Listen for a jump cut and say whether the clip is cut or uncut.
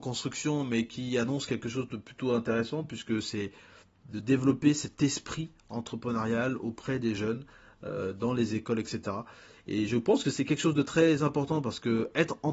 uncut